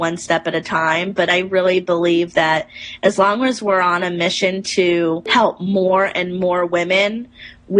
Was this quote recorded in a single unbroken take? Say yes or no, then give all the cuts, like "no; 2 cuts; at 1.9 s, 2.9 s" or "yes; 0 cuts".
yes; 0 cuts